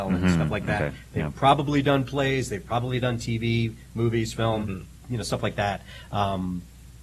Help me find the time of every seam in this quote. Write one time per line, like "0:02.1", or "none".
none